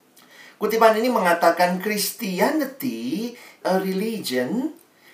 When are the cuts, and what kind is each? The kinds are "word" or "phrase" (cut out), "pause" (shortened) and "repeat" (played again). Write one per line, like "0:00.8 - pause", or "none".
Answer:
0:03.6 - word